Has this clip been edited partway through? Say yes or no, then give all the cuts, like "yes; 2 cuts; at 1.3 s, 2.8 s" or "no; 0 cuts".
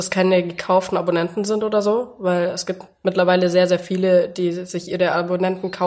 no; 0 cuts